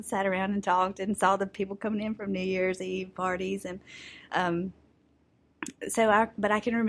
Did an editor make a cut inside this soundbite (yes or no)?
no